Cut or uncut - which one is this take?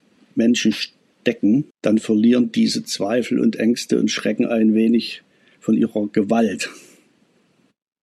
cut